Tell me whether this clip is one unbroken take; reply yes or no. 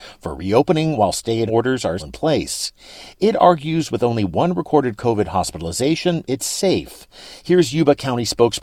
no